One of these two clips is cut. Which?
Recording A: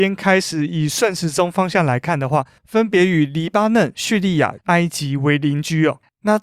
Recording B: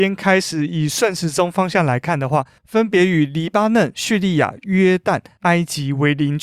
A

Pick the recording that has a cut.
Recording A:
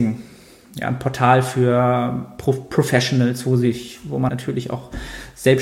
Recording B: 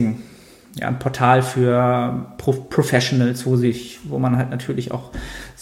A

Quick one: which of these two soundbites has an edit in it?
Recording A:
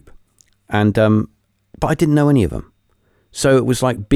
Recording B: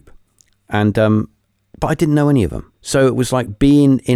B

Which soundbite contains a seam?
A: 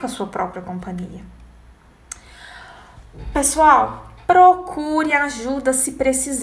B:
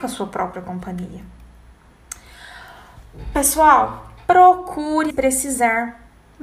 B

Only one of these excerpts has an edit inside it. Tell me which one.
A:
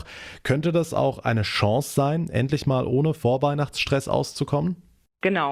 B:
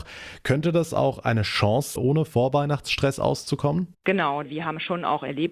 B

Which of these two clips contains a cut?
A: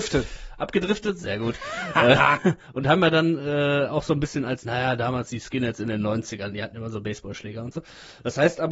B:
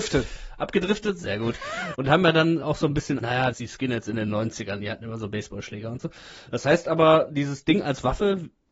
B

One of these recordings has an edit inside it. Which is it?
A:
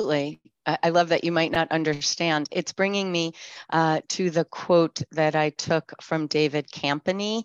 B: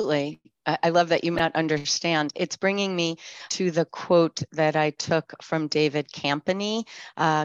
B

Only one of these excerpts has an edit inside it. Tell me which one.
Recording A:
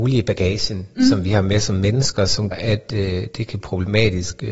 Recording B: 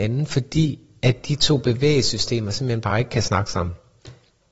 A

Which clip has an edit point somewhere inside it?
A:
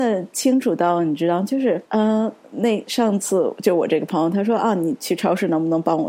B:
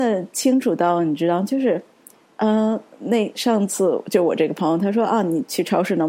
A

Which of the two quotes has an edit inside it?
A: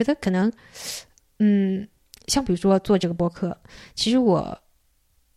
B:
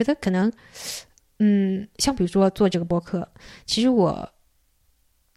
B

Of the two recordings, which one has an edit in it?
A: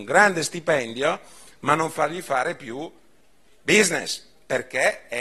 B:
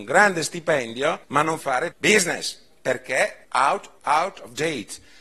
B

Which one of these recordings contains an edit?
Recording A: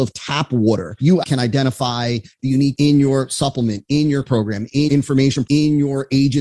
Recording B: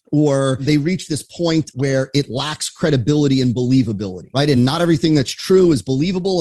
A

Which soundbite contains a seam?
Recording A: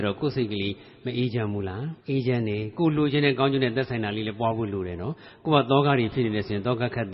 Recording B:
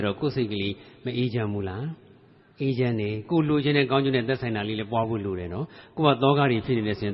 A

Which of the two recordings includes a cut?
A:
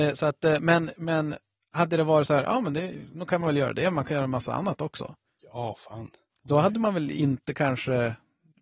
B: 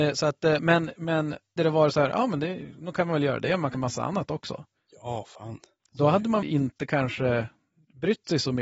B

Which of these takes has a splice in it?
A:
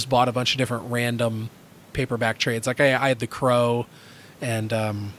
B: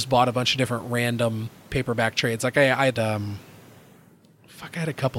B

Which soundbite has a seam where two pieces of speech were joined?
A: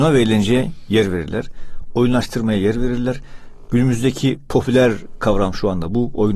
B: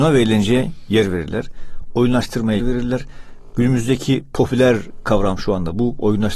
B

